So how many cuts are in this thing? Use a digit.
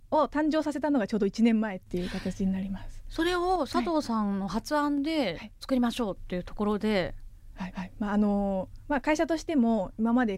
1